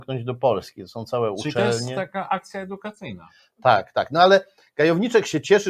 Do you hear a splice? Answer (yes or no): no